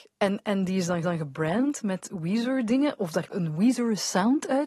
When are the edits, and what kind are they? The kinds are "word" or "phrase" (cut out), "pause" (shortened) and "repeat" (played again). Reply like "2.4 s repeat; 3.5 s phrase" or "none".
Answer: 1.0 s repeat; 3.3 s word